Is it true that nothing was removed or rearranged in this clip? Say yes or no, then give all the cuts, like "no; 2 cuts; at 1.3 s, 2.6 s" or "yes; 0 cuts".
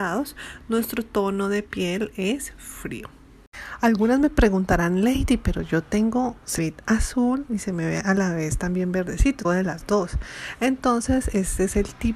no; 2 cuts; at 6.6 s, 9.4 s